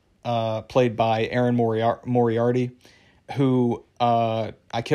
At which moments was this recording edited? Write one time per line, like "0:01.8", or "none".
none